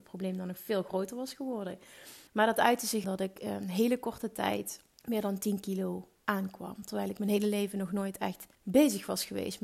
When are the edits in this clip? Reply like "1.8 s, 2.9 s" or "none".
2.3 s, 3.0 s, 4.9 s, 8.5 s